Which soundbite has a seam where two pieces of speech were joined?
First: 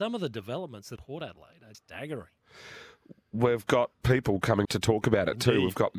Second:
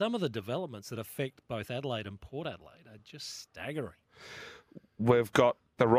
first; 4 cuts; at 1.0 s, 1.7 s, 4.0 s, 4.6 s

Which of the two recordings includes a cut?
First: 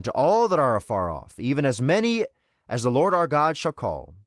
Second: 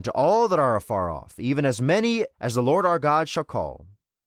second; 1 cut; at 2.3 s

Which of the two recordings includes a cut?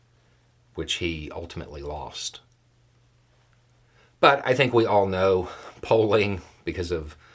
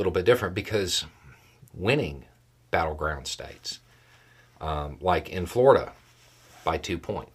second; 1 cut; at 1.7 s

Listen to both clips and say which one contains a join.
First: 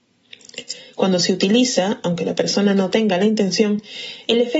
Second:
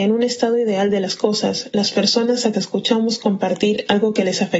second; 1 cut; at 2.5 s

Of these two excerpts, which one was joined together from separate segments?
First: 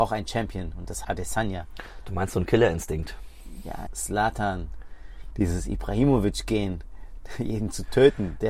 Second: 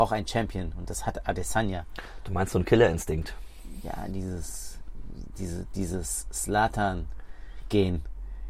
first; 3 cuts; at 1.0 s, 3.9 s, 5.3 s

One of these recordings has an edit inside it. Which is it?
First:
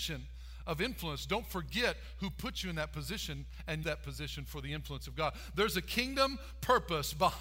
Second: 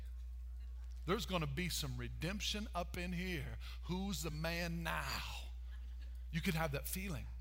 first; 1 cut; at 3.8 s

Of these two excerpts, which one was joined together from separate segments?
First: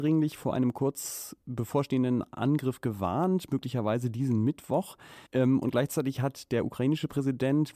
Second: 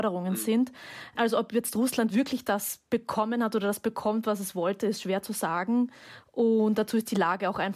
first; 1 cut; at 5.3 s

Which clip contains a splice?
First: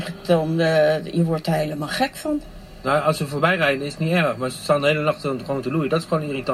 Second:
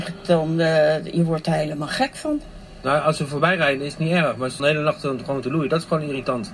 second; 1 cut; at 4.6 s

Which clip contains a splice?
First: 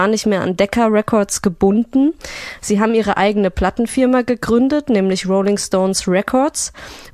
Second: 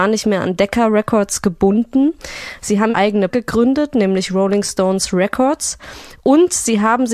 second; 2 cuts; at 2.9 s, 3.3 s

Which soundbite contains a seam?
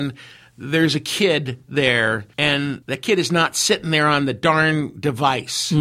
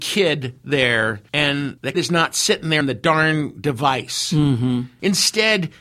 second; 2 cuts; at 1.9 s, 2.8 s

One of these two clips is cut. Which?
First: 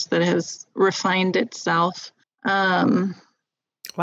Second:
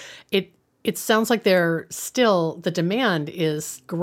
first; 1 cut; at 2.2 s

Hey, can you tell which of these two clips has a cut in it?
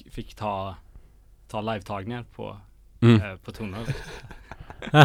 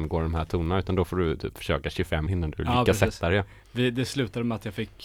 second; 1 cut; at 2.3 s

